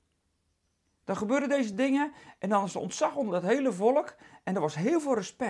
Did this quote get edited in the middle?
no; 0 cuts

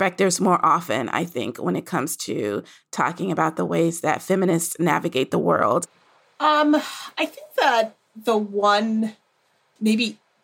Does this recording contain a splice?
no; 0 cuts

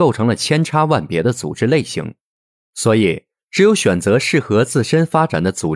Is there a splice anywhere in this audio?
no; 0 cuts

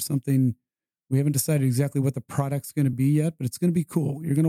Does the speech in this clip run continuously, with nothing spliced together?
yes; 0 cuts

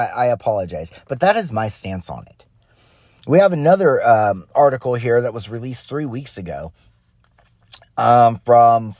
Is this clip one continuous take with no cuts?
yes; 0 cuts

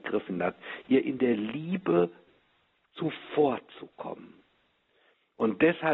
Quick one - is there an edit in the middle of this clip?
no; 0 cuts

